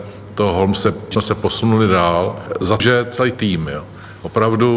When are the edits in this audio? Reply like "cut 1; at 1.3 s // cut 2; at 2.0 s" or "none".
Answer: cut 1; at 1.1 s // cut 2; at 2.8 s // cut 3; at 3.3 s